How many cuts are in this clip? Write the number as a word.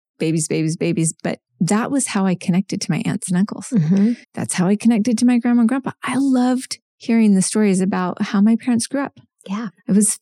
two